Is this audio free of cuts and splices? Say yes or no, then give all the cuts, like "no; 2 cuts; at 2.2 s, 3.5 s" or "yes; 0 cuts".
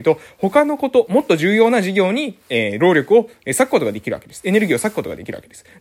yes; 0 cuts